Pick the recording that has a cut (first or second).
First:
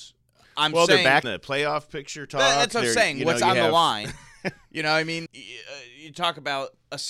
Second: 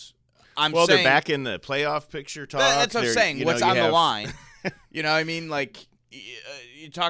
first